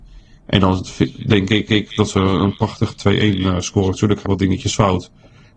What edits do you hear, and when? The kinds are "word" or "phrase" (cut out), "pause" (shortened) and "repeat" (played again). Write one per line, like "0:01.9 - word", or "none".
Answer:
0:01.7 - repeat
0:04.3 - word

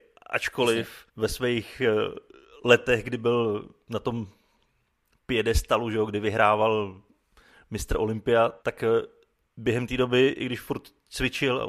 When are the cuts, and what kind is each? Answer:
0:01.1 - pause
0:08.6 - pause

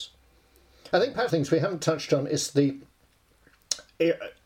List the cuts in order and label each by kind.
0:01.3 - phrase

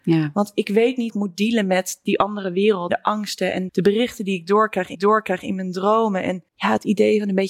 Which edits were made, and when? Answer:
0:01.1 - word
0:02.9 - word
0:03.7 - word
0:04.9 - repeat
0:06.5 - pause

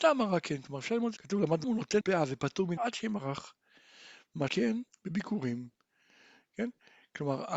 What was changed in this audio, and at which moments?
0:01.2 - phrase
0:01.6 - word
0:02.0 - word
0:02.8 - word
0:04.5 - word
0:04.9 - pause

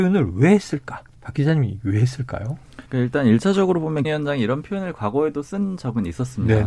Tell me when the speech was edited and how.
0:01.1 - pause
0:02.9 - pause
0:04.0 - word

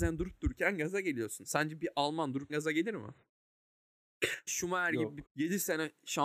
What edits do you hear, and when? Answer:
0:02.5 - word
0:04.5 - word
0:05.2 - word

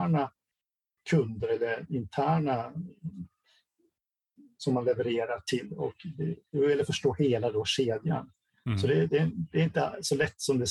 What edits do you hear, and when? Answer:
none

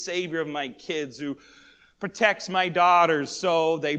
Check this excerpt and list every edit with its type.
none

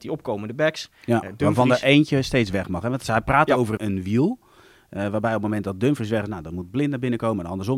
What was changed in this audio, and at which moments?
0:03.8 - word

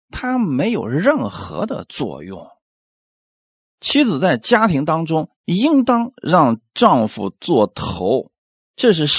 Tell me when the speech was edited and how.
0:05.4 - pause

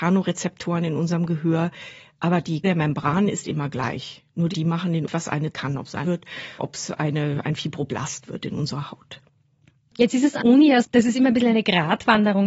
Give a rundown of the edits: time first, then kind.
0:02.6 - word
0:04.5 - word
0:05.1 - word
0:05.5 - word
0:06.0 - word
0:06.6 - word
0:10.4 - word
0:10.8 - word

